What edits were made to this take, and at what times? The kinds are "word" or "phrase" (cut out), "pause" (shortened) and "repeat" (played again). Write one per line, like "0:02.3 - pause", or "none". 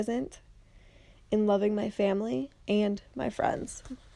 0:02.6 - pause